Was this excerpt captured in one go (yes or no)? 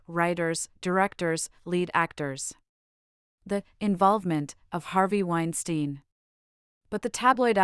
yes